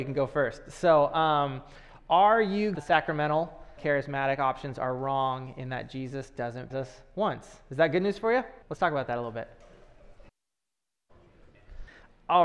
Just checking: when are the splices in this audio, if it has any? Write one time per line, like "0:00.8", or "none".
0:02.7
0:03.8
0:06.7
0:08.6